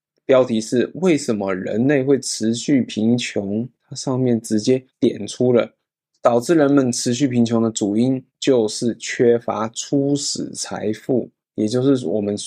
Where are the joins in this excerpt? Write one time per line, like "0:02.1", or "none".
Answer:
0:03.8
0:04.9
0:08.3